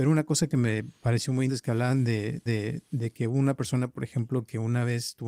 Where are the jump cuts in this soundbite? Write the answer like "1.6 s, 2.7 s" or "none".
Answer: 1.5 s, 2.5 s